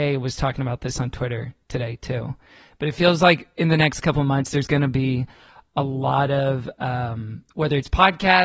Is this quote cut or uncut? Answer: uncut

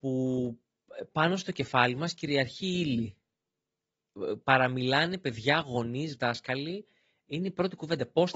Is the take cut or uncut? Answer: uncut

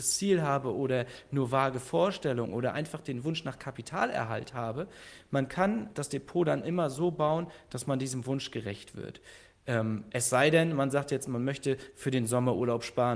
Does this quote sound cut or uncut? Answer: uncut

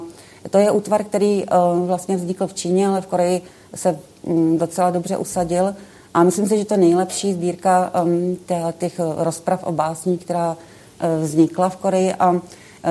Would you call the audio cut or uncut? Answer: uncut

